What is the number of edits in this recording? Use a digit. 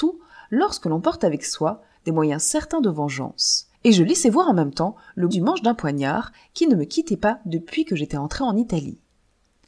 2